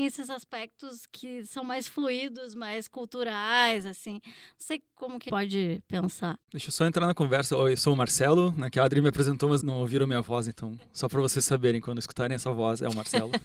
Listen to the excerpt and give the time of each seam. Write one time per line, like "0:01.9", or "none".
0:01.1
0:05.3
0:06.4
0:09.6

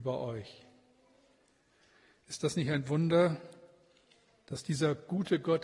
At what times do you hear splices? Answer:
none

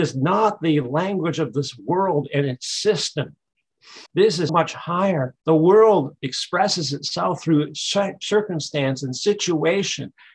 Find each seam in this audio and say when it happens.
0:04.1
0:04.5
0:05.4

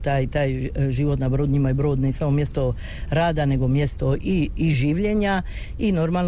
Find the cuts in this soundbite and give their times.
none

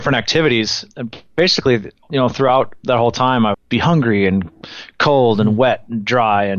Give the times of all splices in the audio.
0:00.9
0:03.5

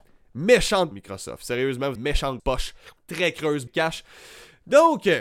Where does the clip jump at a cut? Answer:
0:00.9
0:02.0
0:02.4
0:03.0
0:03.7

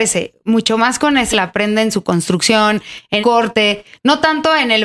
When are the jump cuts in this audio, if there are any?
0:01.3
0:03.2

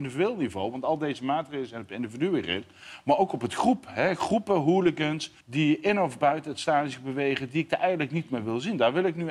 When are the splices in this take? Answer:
0:05.4

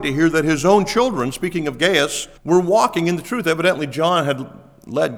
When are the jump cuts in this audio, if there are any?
0:02.4

